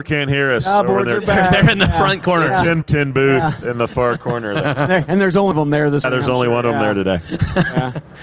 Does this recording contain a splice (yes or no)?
yes